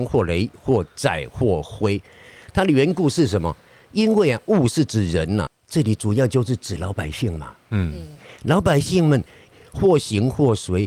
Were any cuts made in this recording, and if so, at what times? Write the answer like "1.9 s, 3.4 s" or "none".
5.5 s